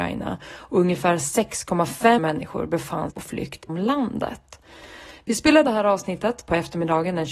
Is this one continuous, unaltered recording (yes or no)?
no